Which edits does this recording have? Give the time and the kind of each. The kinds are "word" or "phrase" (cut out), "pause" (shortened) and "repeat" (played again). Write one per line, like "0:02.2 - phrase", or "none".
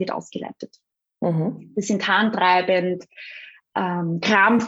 none